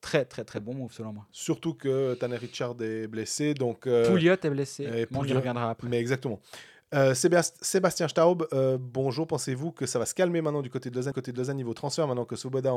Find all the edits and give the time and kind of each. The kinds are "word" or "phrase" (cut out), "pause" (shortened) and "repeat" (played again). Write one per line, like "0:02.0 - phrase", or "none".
0:11.1 - repeat

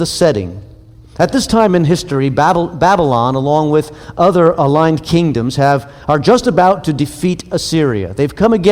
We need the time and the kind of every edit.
none

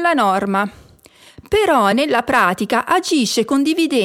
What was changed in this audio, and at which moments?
none

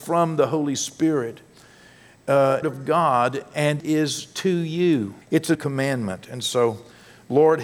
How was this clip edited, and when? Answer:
0:02.6 - phrase
0:03.8 - word
0:05.2 - pause
0:05.5 - word

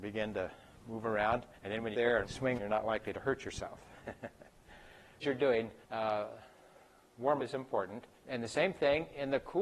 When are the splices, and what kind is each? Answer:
0:01.5 - pause
0:01.9 - phrase
0:02.2 - word
0:02.6 - phrase
0:05.2 - phrase
0:05.8 - pause
0:07.4 - word
0:08.2 - pause

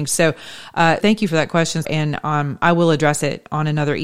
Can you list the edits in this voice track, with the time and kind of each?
0:01.0 - word
0:01.8 - word

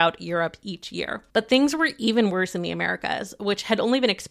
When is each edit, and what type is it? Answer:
0:01.3 - pause

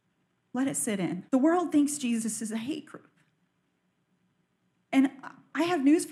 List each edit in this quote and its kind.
0:01.3 - pause

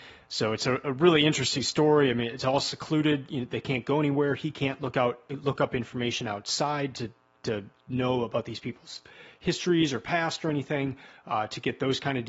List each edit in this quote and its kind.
none

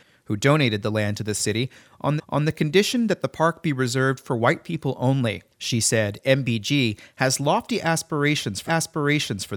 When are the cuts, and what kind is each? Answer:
0:02.2 - repeat
0:05.5 - pause
0:08.7 - repeat

